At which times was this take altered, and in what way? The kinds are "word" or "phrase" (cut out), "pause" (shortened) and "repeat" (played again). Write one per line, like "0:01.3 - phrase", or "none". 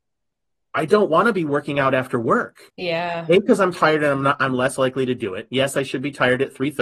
0:02.7 - pause